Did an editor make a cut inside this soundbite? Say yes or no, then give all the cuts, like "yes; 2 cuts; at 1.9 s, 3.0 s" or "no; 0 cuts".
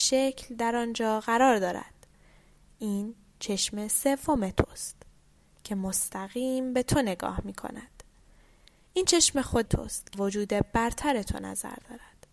yes; 2 cuts; at 9.6 s, 10.1 s